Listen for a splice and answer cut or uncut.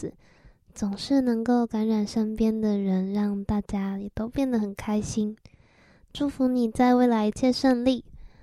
uncut